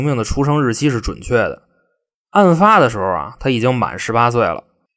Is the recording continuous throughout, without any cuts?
yes; 0 cuts

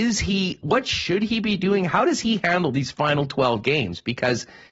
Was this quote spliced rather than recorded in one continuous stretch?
no; 0 cuts

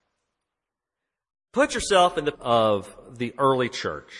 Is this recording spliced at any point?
yes; 1 cut; at 2.3 s

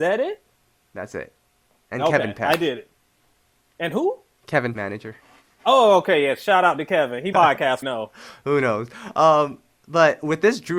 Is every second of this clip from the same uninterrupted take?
no; 3 cuts; at 4.8 s, 7.3 s, 7.8 s

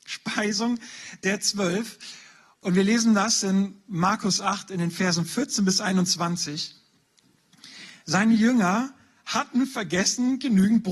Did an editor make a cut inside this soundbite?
no; 0 cuts

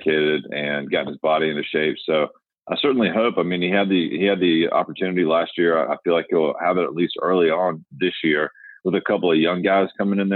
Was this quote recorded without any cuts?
yes; 0 cuts

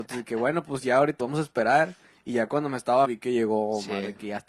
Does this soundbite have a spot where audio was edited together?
yes; 2 cuts; at 1.2 s, 3.0 s

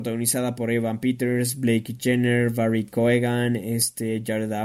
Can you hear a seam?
no; 0 cuts

